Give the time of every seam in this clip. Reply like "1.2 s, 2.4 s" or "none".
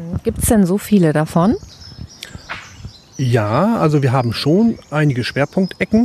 none